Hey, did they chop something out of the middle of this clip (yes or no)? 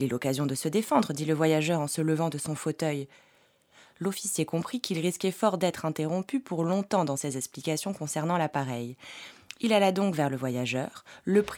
no